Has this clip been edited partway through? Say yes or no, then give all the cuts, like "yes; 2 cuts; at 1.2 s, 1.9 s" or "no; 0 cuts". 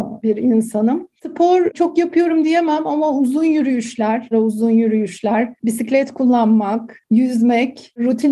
yes; 1 cut; at 4.3 s